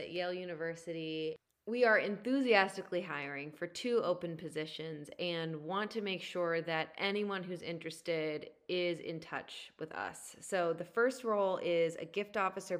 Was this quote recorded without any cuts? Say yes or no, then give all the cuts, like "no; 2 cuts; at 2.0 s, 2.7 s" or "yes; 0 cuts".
yes; 0 cuts